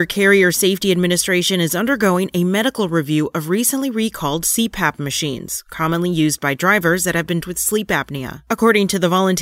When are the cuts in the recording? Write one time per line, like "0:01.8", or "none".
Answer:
0:07.4